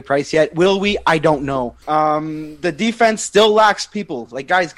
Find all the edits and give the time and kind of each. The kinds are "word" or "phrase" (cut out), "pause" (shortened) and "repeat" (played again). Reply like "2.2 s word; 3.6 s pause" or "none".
1.8 s pause